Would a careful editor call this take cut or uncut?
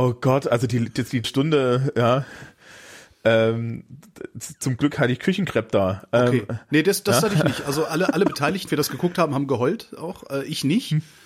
cut